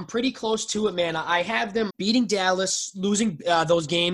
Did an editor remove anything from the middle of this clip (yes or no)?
yes